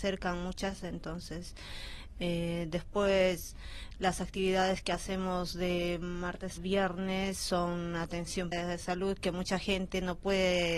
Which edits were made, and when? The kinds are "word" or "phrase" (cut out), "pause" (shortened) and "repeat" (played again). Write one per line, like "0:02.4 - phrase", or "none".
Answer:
0:06.6 - word
0:08.5 - word